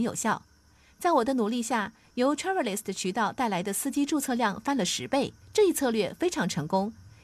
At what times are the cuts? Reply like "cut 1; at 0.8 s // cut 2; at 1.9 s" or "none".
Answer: cut 1; at 5.4 s